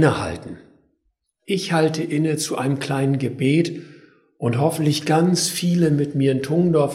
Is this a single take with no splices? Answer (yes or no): yes